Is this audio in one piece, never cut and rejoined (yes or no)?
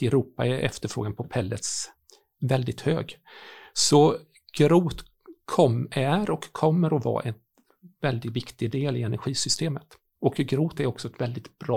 yes